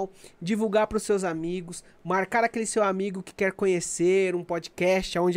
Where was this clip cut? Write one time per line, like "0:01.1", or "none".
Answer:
none